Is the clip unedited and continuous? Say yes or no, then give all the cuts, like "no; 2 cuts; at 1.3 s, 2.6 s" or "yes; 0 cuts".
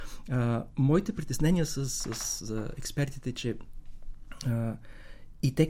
yes; 0 cuts